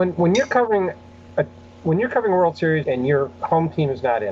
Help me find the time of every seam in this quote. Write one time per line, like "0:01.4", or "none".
0:02.8